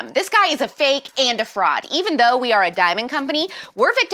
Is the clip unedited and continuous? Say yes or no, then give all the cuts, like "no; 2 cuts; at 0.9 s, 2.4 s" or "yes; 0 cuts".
yes; 0 cuts